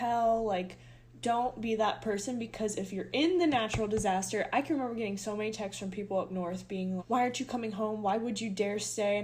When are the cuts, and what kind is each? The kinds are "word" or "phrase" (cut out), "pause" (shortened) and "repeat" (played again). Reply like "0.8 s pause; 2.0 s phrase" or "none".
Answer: 7.0 s word

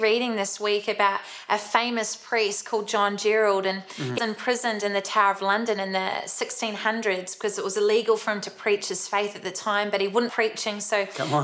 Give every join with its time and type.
4.2 s word; 10.3 s word

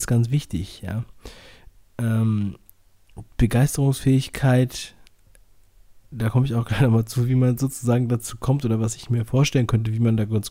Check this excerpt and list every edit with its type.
none

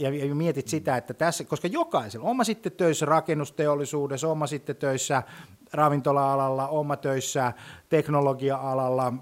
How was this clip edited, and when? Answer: none

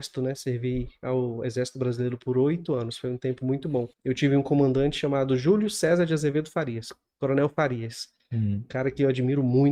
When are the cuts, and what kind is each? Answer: 3.9 s pause

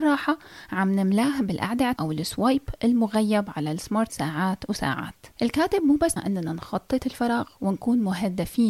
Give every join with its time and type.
2.0 s word; 4.1 s word; 5.3 s pause; 6.2 s word; 7.0 s word

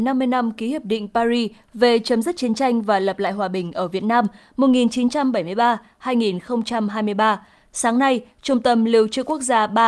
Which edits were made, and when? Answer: none

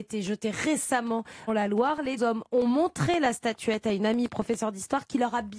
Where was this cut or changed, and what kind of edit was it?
1.5 s word; 2.2 s word

